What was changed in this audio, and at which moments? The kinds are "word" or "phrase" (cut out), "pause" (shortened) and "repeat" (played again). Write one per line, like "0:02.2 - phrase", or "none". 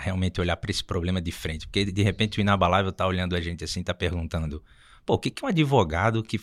none